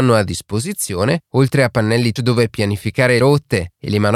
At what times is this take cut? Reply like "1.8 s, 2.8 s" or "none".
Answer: 2.2 s, 3.2 s